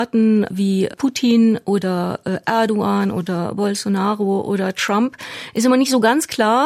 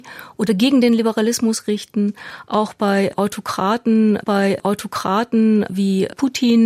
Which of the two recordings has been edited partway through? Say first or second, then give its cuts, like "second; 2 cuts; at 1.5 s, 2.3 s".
second; 1 cut; at 4.2 s